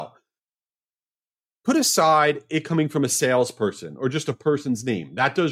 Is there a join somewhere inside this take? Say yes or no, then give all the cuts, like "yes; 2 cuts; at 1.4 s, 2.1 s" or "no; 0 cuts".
no; 0 cuts